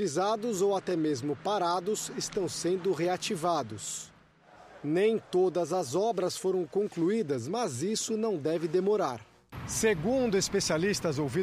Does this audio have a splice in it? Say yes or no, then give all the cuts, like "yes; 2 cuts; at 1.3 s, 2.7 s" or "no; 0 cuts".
no; 0 cuts